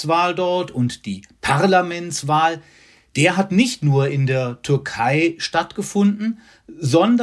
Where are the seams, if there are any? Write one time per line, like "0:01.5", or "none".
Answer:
none